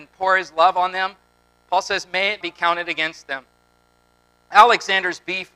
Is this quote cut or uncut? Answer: cut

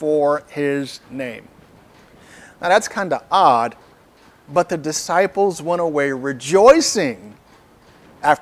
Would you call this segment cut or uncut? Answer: uncut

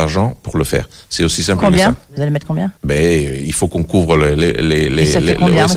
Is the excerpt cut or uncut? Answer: cut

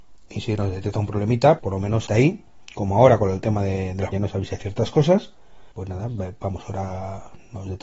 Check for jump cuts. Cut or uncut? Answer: cut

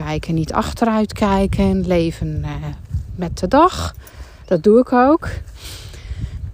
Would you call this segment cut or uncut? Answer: uncut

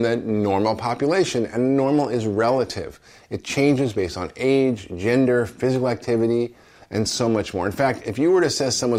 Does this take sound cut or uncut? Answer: uncut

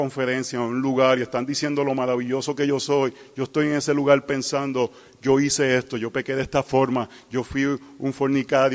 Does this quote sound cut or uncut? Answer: uncut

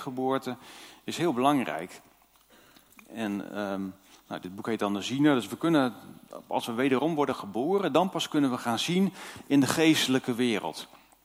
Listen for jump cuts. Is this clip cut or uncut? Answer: uncut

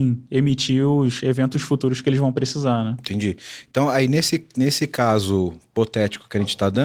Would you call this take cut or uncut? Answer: uncut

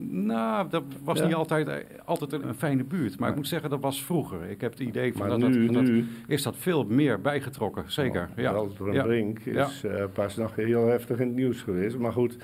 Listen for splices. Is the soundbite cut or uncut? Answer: cut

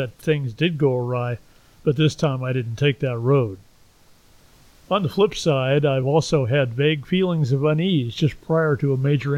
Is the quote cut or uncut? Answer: uncut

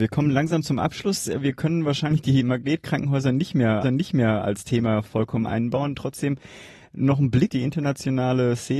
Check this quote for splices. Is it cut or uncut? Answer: cut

